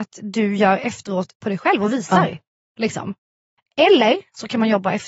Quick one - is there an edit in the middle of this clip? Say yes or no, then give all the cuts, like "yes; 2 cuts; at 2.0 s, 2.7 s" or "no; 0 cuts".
no; 0 cuts